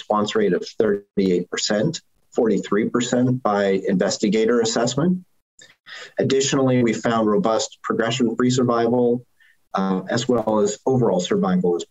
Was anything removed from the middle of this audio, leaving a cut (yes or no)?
no